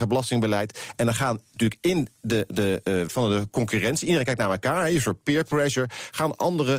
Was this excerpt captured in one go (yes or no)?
no